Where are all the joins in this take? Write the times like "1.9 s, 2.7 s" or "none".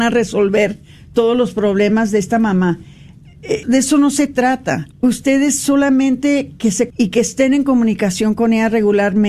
3.6 s, 4.9 s, 6.9 s